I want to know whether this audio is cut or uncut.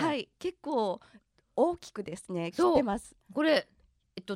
uncut